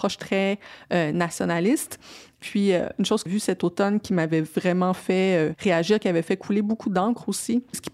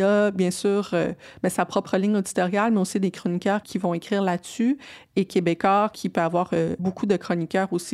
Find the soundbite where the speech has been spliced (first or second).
first